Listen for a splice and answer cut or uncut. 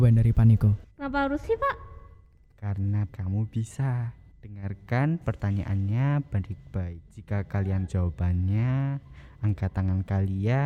cut